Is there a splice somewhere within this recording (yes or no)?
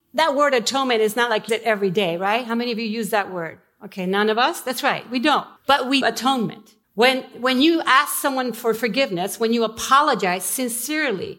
yes